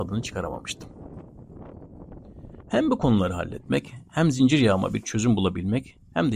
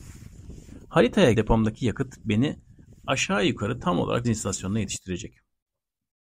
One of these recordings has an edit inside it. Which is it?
second; 2 cuts; at 1.3 s, 4.2 s

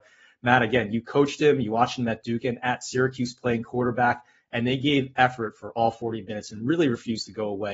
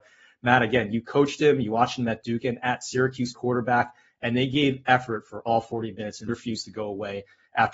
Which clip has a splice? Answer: second; 2 cuts; at 3.3 s, 6.3 s

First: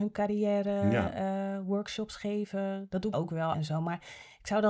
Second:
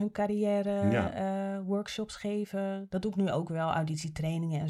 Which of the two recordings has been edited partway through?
first; 2 cuts; at 3.1 s, 3.5 s

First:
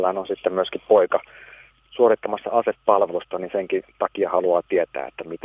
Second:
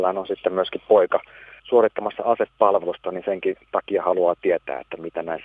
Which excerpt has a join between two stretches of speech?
second; 1 cut; at 1.6 s

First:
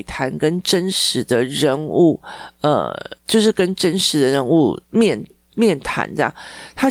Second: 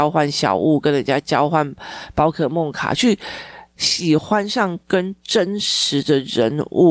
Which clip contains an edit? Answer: first; 2 cuts; at 3.2 s, 4.8 s

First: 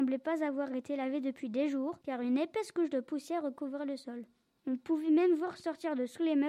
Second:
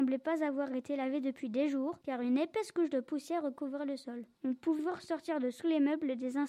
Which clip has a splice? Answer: second; 2 cuts; at 4.3 s, 4.8 s

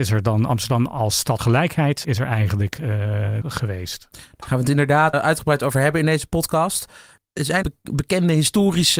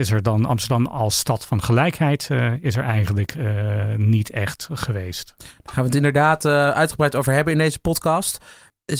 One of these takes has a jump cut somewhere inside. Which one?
first; 5 cuts; at 1.4 s, 2.0 s, 3.4 s, 5.1 s, 7.6 s

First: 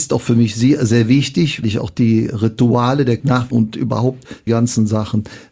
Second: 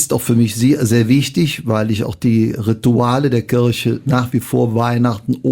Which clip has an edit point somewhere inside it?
first; 4 cuts; at 1.6 s, 3.2 s, 3.5 s, 4.5 s

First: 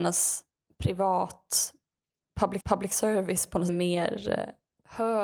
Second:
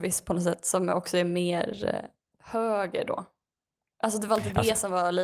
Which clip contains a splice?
first; 2 cuts; at 2.6 s, 3.7 s

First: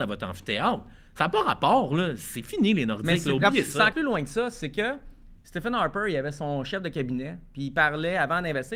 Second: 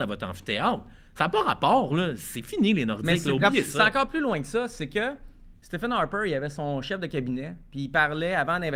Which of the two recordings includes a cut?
first; 1 cut; at 3.9 s

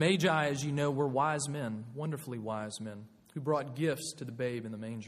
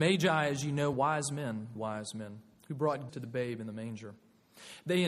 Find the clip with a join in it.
second; 3 cuts; at 0.9 s, 1.7 s, 3.1 s

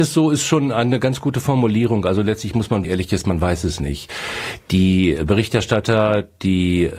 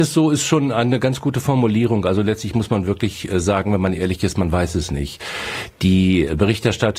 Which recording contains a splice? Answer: first; 1 cut; at 2.8 s

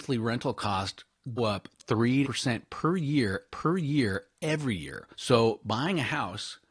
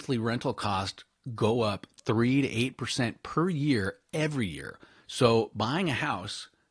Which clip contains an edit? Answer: first; 4 cuts; at 1.4 s, 2.2 s, 3.5 s, 5.1 s

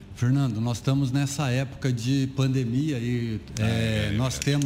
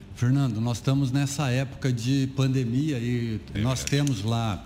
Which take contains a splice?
second; 1 cut; at 3.5 s

